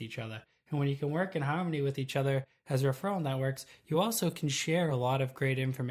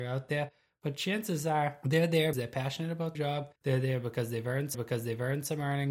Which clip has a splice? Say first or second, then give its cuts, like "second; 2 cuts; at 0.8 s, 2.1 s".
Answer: second; 4 cuts; at 2.3 s, 3.1 s, 3.6 s, 4.7 s